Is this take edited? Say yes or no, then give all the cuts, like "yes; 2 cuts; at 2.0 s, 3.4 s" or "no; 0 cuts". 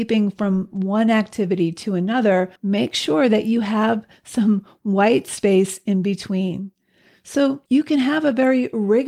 yes; 2 cuts; at 2.6 s, 7.7 s